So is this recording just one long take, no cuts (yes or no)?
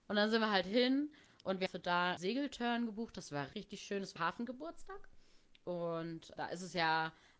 no